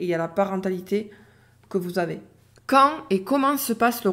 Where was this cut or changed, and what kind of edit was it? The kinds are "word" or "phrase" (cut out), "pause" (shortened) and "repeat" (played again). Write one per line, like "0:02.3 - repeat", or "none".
none